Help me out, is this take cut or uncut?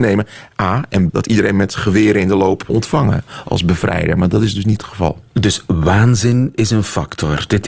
cut